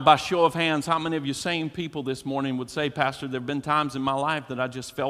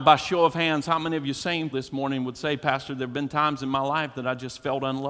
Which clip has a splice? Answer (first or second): second